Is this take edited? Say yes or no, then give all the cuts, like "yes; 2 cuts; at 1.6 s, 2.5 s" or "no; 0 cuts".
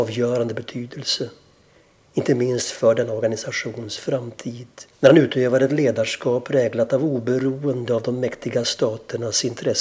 yes; 1 cut; at 4.9 s